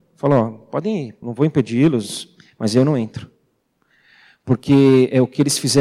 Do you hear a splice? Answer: yes; 1 cut; at 1.2 s

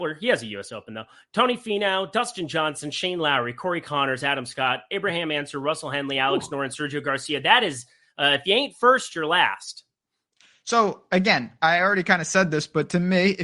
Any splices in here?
no; 0 cuts

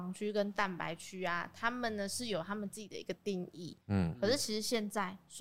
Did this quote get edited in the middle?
yes; 1 cut; at 3.8 s

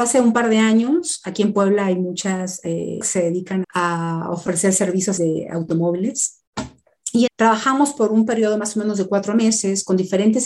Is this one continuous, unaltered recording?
no; 4 cuts; at 3.0 s, 3.6 s, 5.2 s, 7.3 s

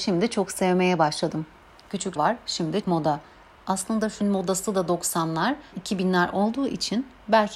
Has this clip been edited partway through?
yes; 4 cuts; at 2.2 s, 2.8 s, 4.2 s, 5.7 s

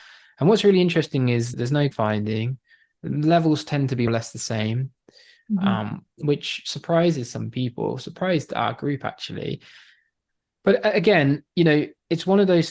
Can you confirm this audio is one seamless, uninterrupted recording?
no; 3 cuts; at 1.5 s, 1.9 s, 4.1 s

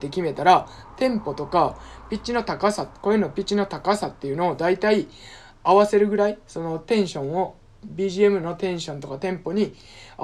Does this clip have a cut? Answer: no; 0 cuts

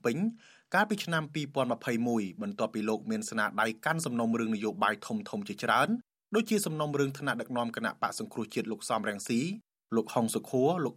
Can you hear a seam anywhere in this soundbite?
no; 0 cuts

